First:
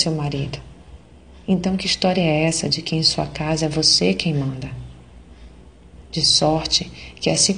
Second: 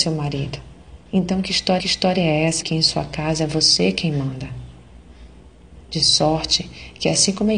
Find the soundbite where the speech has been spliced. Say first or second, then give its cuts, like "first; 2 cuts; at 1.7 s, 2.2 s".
second; 3 cuts; at 1.1 s, 1.8 s, 2.6 s